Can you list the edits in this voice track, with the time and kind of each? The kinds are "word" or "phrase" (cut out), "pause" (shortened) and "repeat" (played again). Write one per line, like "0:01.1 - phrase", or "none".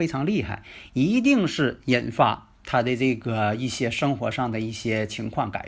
0:02.5 - pause